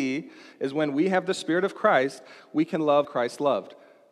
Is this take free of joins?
no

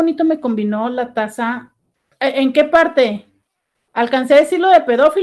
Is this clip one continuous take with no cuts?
yes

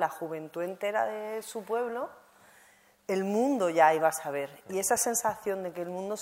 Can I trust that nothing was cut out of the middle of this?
yes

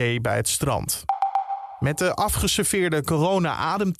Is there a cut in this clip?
no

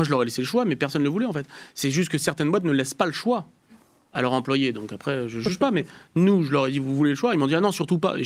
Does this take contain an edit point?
no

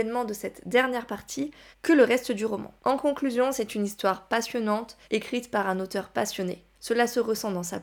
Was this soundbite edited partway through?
yes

